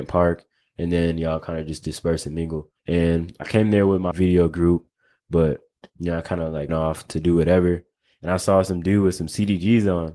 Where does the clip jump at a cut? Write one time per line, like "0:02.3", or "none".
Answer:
0:02.8
0:04.1
0:06.7